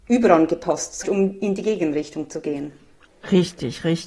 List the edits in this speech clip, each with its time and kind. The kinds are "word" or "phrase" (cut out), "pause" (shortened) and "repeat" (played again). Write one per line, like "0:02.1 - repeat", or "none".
0:01.0 - phrase